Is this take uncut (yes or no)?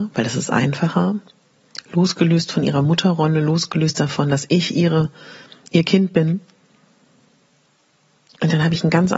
yes